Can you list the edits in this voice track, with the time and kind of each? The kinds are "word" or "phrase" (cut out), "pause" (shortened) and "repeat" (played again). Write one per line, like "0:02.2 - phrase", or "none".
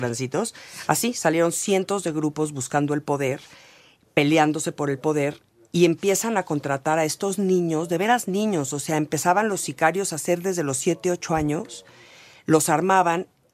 none